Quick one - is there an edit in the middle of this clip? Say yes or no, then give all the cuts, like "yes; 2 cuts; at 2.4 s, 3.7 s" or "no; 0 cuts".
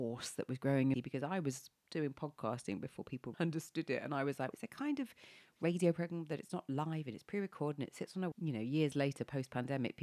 yes; 5 cuts; at 0.9 s, 1.8 s, 3.3 s, 4.5 s, 8.3 s